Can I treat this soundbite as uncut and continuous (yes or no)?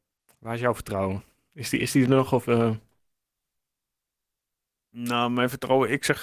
yes